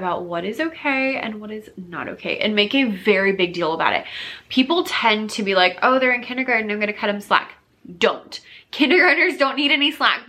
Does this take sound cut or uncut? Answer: uncut